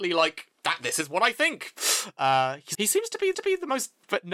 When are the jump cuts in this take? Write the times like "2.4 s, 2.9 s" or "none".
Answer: 2.7 s, 3.3 s